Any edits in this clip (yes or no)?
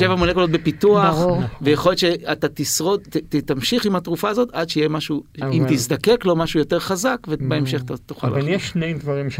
no